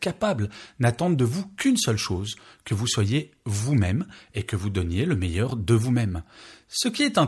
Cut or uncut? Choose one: uncut